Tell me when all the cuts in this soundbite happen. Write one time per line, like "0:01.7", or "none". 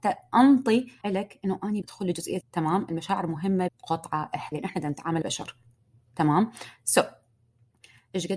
0:01.0
0:01.8
0:02.4
0:03.7
0:04.5
0:05.2